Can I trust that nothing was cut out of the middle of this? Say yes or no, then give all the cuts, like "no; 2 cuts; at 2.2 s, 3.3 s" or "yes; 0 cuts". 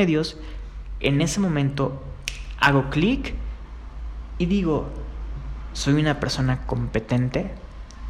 yes; 0 cuts